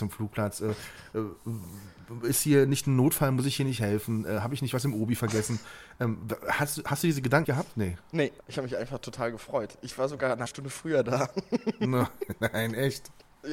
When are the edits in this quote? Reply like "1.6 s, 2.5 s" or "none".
7.4 s, 8.4 s, 10.5 s